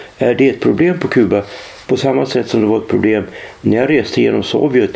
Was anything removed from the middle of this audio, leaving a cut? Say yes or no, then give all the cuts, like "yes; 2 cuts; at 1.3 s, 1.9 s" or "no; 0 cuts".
no; 0 cuts